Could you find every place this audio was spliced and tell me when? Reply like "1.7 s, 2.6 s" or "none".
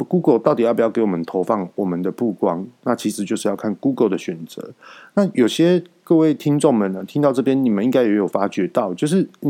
none